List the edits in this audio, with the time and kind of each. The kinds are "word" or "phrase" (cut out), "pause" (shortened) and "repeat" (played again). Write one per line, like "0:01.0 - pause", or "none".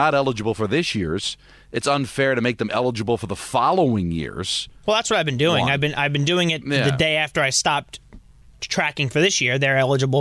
none